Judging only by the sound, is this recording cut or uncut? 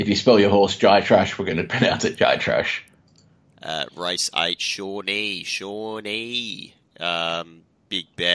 uncut